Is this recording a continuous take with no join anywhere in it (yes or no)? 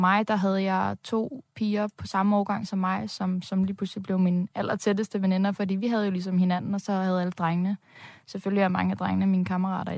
yes